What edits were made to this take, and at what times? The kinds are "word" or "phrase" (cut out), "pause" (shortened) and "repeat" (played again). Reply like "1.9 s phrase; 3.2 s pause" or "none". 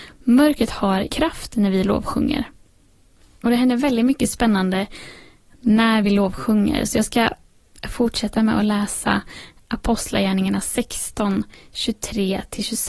1.1 s word